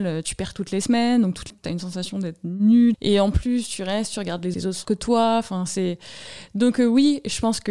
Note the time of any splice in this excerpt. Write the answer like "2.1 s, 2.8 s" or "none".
1.5 s, 2.9 s, 4.5 s, 4.8 s